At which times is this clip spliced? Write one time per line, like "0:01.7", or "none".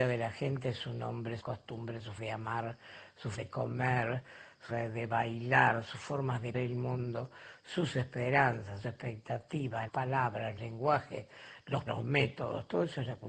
0:01.4
0:02.2
0:03.3
0:04.7
0:06.5
0:08.8
0:09.9
0:10.6
0:11.9